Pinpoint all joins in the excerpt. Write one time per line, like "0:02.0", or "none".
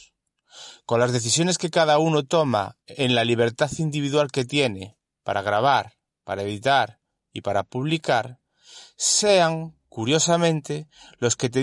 0:02.8
0:09.8